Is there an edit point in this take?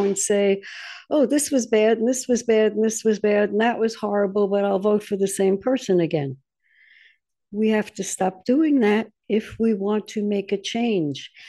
no; 0 cuts

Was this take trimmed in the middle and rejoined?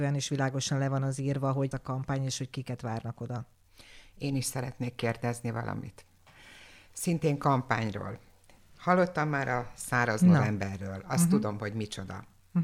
yes; 1 cut; at 1.7 s

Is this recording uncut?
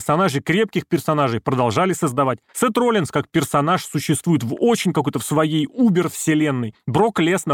yes; 0 cuts

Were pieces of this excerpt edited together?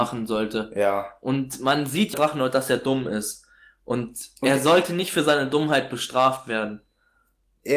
yes; 2 cuts; at 2.1 s, 4.4 s

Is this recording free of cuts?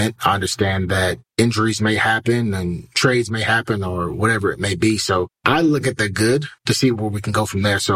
no; 3 cuts; at 1.3 s, 5.3 s, 6.6 s

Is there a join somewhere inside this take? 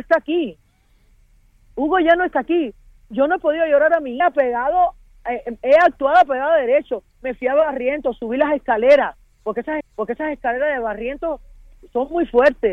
yes; 2 cuts; at 4.2 s, 9.8 s

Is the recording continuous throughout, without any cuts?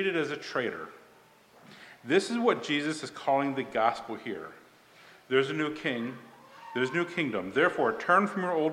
yes; 0 cuts

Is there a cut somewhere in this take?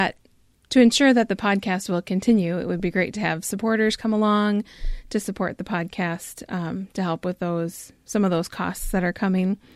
no; 0 cuts

